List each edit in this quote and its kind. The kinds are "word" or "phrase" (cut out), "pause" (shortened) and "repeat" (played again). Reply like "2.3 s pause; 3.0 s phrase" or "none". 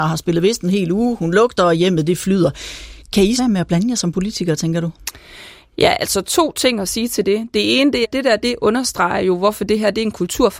3.4 s phrase; 8.0 s word